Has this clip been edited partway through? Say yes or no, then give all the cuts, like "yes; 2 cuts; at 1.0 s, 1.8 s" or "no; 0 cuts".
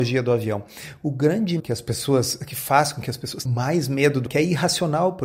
yes; 3 cuts; at 1.6 s, 3.4 s, 4.3 s